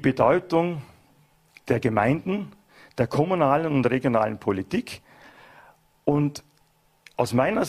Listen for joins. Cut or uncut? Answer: uncut